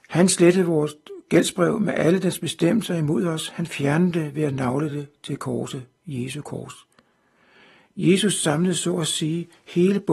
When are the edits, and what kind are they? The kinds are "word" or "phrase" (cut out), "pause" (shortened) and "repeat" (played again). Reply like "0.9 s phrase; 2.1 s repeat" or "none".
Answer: none

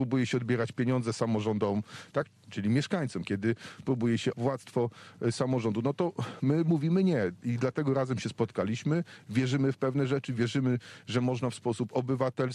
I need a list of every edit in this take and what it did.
4.3 s word

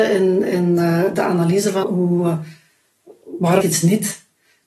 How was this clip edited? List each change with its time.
1.8 s word; 3.6 s word

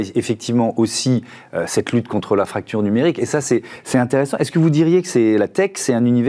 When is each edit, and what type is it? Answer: none

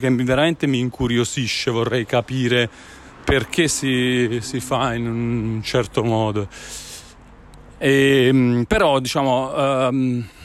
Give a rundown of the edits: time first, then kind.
none

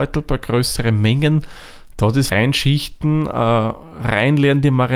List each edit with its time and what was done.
2.3 s word

